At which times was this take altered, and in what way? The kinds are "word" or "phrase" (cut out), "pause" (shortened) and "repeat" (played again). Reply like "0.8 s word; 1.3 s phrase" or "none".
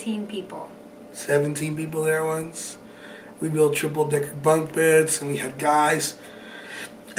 none